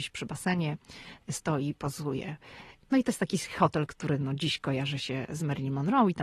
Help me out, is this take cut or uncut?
uncut